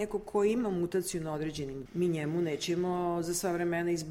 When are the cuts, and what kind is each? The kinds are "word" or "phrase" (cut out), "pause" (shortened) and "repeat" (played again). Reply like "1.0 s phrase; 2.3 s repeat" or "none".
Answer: 1.9 s word